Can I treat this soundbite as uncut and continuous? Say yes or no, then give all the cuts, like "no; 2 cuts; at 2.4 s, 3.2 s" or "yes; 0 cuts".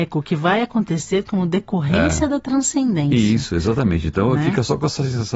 yes; 0 cuts